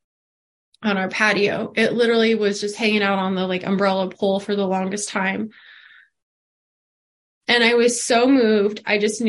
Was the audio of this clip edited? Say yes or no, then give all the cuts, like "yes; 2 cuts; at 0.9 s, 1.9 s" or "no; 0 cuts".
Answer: no; 0 cuts